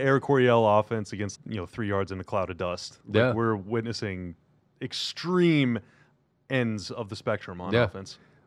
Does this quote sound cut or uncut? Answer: cut